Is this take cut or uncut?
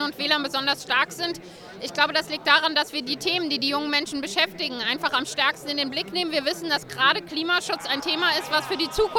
uncut